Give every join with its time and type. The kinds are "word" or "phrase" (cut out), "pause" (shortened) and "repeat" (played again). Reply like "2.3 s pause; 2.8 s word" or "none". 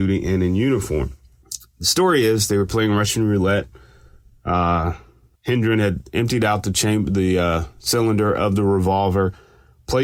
none